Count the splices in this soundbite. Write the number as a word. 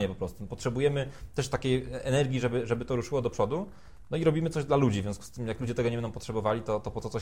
zero